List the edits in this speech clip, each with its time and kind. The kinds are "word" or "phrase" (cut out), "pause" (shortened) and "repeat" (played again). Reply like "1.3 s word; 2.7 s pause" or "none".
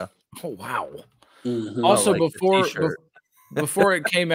none